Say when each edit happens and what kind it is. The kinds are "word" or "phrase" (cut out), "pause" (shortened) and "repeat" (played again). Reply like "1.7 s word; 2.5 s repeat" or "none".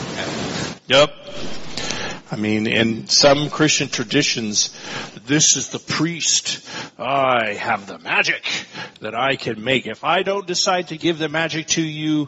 5.8 s phrase